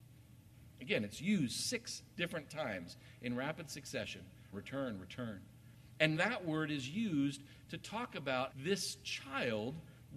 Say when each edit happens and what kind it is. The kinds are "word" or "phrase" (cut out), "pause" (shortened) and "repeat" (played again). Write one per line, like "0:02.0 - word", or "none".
0:04.5 - word
0:06.1 - word
0:08.5 - word